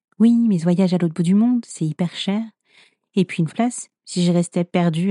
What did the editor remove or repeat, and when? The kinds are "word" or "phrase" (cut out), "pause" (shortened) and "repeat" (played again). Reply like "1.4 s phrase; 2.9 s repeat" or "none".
3.5 s word